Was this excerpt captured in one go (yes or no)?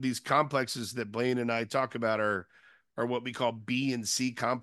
yes